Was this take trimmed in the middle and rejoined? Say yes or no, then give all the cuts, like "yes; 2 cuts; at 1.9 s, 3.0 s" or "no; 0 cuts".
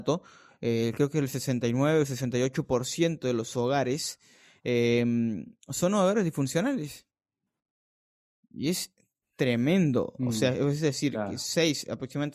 no; 0 cuts